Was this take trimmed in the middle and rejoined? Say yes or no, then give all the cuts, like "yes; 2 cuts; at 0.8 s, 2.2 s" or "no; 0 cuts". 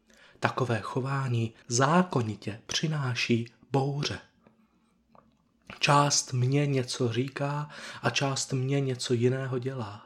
yes; 1 cut; at 1.6 s